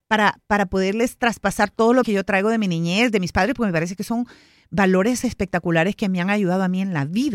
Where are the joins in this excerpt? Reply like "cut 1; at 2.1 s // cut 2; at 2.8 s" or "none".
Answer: cut 1; at 2.0 s

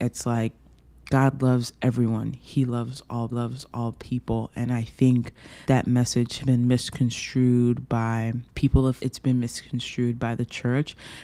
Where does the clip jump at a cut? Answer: cut 1; at 3.3 s // cut 2; at 5.6 s // cut 3; at 6.4 s // cut 4; at 8.5 s // cut 5; at 9.0 s

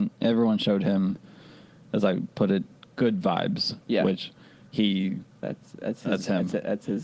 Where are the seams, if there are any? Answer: none

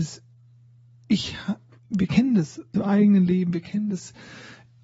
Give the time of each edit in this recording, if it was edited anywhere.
cut 1; at 1.7 s // cut 2; at 2.7 s

